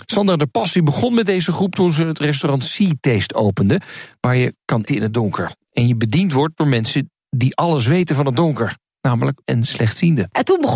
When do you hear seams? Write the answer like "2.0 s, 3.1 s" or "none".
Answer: 4.9 s, 9.4 s